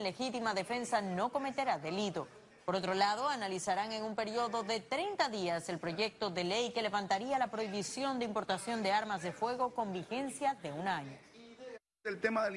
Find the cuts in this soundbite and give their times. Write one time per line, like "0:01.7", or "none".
none